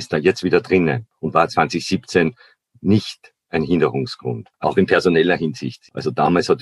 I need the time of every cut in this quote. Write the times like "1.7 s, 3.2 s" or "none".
none

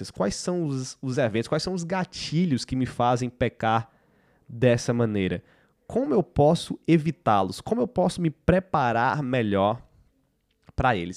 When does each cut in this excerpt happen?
none

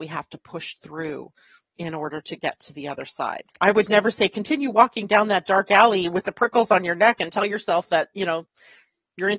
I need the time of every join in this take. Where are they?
3.5 s

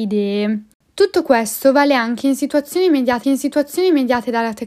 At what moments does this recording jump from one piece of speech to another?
3.2 s

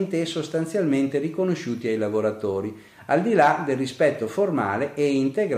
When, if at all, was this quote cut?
none

